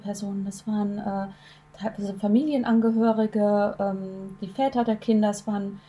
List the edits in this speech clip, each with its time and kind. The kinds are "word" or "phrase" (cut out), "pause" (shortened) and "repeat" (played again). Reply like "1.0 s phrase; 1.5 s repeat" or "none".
none